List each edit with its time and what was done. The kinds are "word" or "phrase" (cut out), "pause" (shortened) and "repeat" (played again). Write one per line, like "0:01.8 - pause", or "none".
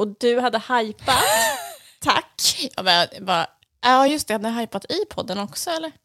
none

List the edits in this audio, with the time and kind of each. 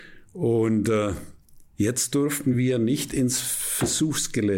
none

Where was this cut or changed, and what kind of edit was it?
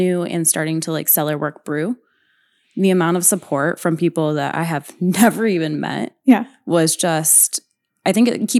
none

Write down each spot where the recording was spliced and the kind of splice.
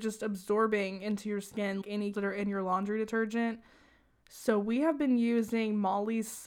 0:01.8 - word
0:02.1 - word

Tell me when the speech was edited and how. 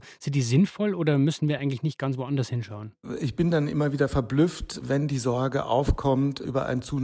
none

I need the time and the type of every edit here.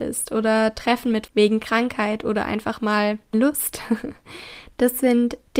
0:01.3 - word
0:03.3 - word

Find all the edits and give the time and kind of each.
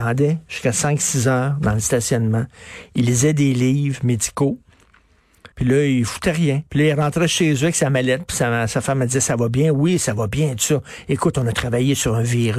0:05.5 - pause
0:06.7 - pause

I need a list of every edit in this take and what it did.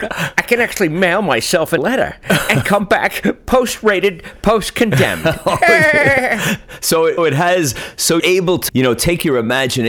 0:01.8 - word
0:07.2 - word
0:08.2 - word
0:08.7 - word

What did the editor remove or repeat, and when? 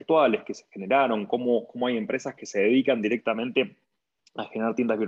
none

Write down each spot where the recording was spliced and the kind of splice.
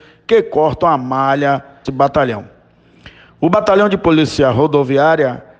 0:01.8 - phrase

